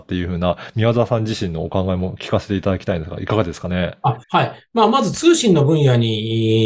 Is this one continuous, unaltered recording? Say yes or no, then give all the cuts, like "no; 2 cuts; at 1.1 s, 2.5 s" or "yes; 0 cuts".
no; 1 cut; at 4.2 s